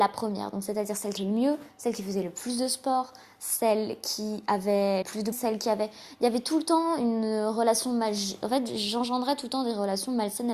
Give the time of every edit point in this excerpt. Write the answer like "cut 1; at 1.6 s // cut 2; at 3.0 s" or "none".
cut 1; at 1.2 s // cut 2; at 5.0 s // cut 3; at 5.3 s